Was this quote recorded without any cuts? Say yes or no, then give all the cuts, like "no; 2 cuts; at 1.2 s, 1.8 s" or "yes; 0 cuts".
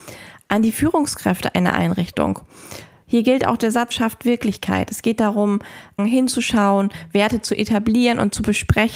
no; 2 cuts; at 3.9 s, 6.0 s